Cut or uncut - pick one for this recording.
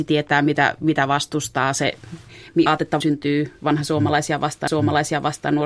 cut